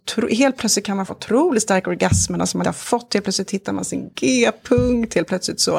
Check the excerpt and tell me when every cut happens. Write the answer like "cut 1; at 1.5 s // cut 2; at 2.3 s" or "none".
cut 1; at 1.1 s // cut 2; at 2.6 s

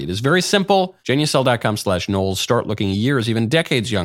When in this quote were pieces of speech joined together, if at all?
cut 1; at 1.0 s

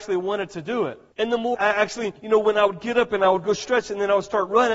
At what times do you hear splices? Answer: cut 1; at 1.1 s // cut 2; at 1.5 s // cut 3; at 2.2 s

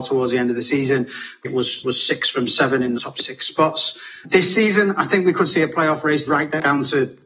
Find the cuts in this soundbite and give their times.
cut 1; at 1.4 s // cut 2; at 1.8 s // cut 3; at 3.0 s // cut 4; at 4.2 s // cut 5; at 6.3 s

